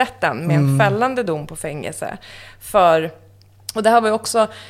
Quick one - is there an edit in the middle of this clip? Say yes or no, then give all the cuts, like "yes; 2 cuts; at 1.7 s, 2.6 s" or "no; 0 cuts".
no; 0 cuts